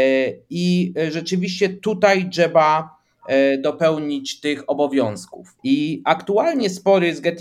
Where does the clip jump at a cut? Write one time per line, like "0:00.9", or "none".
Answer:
0:05.6